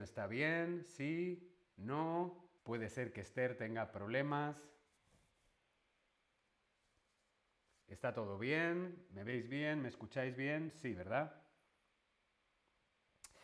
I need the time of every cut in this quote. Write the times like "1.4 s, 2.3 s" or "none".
2.6 s